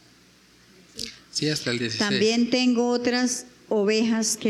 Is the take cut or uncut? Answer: uncut